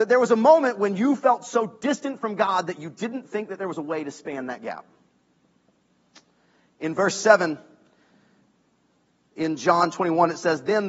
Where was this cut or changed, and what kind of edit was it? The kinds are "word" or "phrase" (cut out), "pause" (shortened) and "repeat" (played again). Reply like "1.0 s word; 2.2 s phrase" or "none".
none